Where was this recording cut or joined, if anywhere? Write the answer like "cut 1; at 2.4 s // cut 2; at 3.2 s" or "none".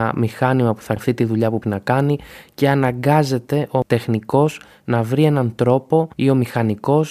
cut 1; at 1.0 s // cut 2; at 1.6 s